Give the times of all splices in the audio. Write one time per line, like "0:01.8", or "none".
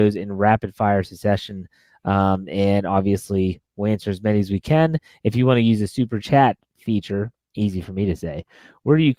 0:06.2

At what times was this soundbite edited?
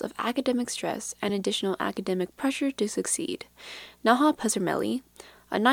none

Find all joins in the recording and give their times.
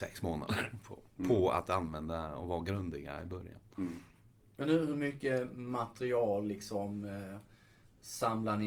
none

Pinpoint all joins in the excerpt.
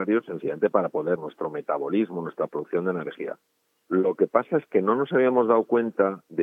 0:01.2

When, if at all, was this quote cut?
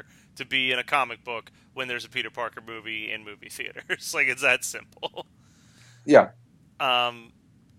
none

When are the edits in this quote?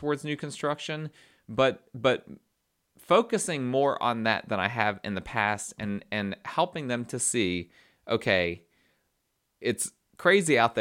none

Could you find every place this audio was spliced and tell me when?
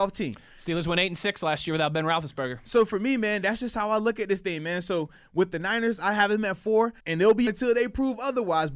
0:07.0
0:07.5

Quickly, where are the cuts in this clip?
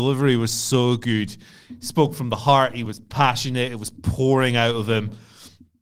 none

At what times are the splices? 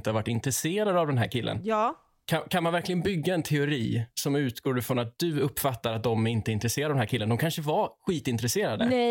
none

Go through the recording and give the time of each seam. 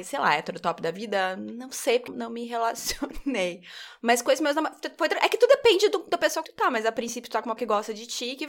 0:02.1
0:06.4
0:07.6

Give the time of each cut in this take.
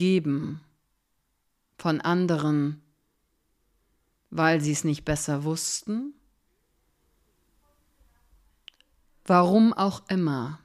none

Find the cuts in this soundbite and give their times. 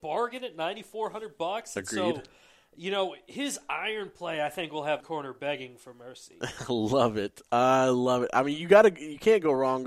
0:05.0

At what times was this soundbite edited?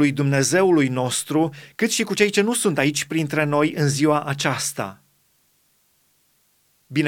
none

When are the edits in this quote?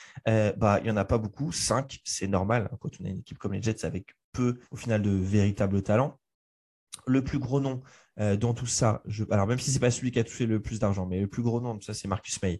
0:04.7

